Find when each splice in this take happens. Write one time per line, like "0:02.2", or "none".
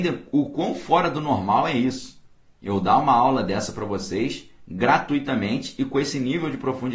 none

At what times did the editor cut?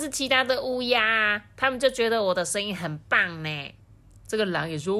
0:03.8

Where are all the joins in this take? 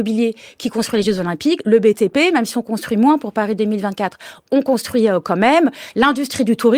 none

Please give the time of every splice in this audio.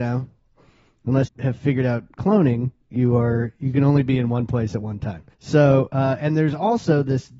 0:01.3
0:05.3

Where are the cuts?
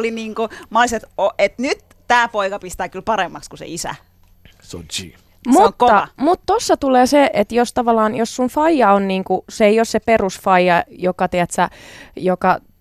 none

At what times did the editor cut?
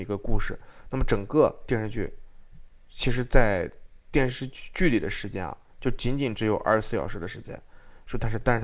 0:02.8

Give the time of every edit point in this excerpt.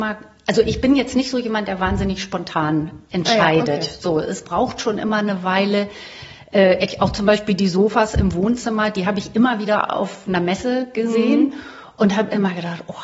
none

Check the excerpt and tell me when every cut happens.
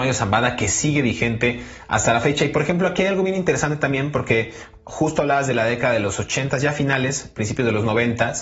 none

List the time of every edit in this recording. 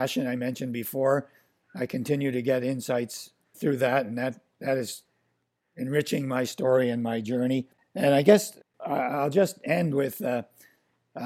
none

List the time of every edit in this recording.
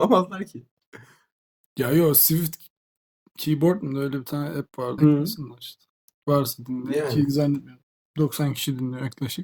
0:05.0

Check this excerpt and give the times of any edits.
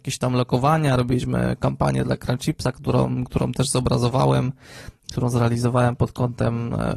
none

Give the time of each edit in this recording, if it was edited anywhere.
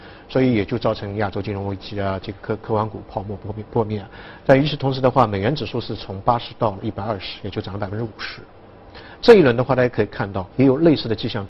0:10.5

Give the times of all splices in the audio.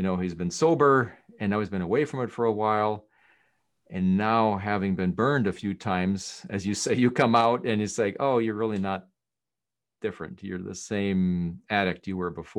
none

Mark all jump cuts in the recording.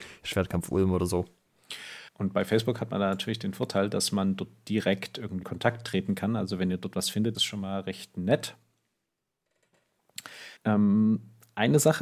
0:02.1
0:05.4
0:07.3
0:10.6

